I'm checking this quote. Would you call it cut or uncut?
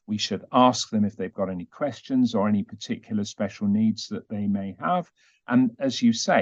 uncut